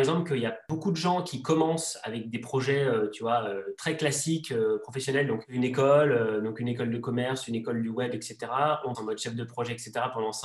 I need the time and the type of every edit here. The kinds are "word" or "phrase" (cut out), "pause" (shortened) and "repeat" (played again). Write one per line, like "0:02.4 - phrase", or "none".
0:08.9 - phrase